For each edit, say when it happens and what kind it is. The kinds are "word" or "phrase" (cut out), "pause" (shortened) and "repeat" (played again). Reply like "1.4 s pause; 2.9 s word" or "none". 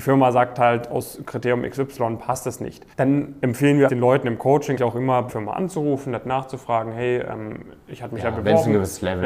2.9 s pause; 3.9 s word; 4.8 s word; 5.3 s word